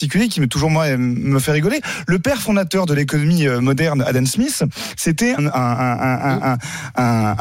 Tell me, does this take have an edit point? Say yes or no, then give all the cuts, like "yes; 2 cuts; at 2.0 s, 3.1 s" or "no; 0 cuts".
yes; 1 cut; at 5.4 s